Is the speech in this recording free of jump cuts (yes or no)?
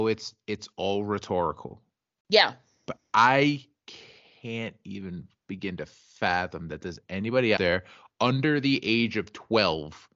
no